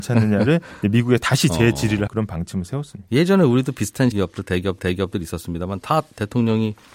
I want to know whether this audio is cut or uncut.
cut